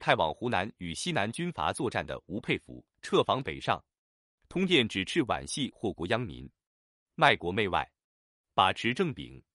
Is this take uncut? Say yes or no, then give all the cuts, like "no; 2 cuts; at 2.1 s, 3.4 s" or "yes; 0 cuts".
no; 1 cut; at 2.9 s